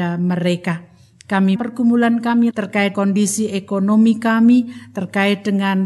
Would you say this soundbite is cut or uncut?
cut